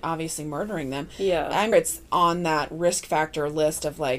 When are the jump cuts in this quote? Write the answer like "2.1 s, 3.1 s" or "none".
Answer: 1.7 s